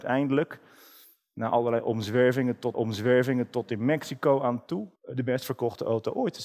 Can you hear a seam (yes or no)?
yes